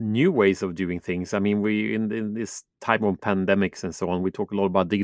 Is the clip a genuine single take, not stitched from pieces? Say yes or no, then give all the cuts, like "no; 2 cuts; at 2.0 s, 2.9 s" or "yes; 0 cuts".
yes; 0 cuts